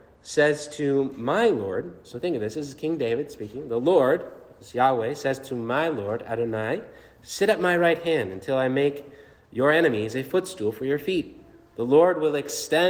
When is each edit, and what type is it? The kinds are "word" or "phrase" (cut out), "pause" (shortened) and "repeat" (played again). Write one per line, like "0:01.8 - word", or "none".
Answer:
none

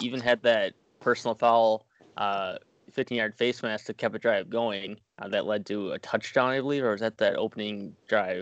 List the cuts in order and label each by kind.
0:01.9 - pause
0:05.1 - pause

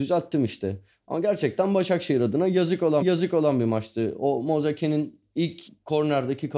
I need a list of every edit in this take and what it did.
0:03.0 - repeat

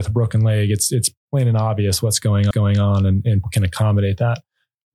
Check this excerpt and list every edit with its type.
0:02.5 - repeat
0:03.4 - word

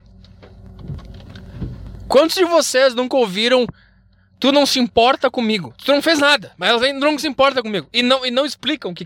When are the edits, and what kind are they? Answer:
none

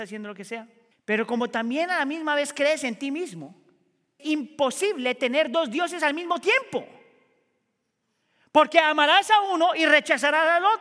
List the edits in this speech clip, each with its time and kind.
0:00.9 - pause
0:04.2 - word

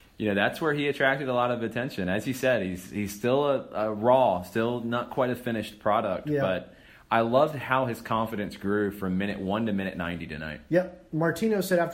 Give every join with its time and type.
none

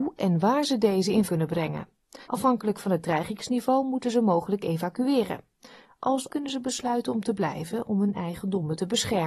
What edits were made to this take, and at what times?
0:01.3 - word
0:02.2 - pause
0:06.3 - word

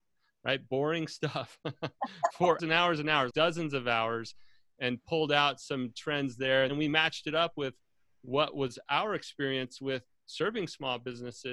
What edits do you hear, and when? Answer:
0:02.6 - word
0:03.3 - word
0:06.7 - word

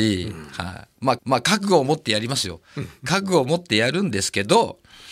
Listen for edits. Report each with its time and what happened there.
0:01.2 - repeat

